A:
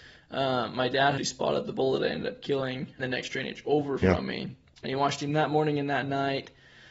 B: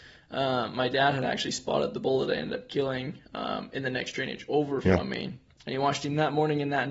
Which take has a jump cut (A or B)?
A